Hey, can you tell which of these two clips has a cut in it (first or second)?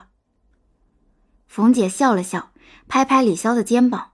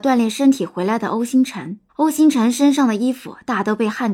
second